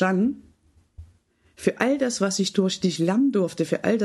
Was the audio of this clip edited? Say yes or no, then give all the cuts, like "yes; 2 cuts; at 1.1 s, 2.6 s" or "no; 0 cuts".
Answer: no; 0 cuts